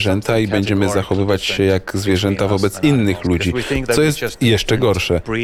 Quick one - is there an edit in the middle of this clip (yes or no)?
no